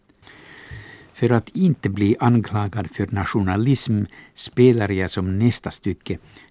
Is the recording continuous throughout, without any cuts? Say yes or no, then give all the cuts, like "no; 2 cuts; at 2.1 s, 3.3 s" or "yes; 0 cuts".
yes; 0 cuts